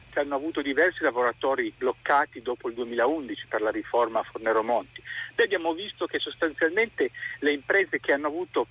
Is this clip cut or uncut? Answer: cut